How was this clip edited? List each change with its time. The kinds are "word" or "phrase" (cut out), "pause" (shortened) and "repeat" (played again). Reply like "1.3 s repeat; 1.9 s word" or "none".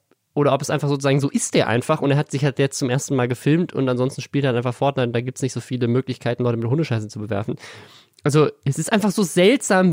none